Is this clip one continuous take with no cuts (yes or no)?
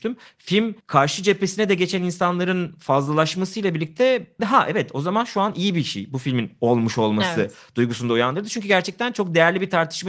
no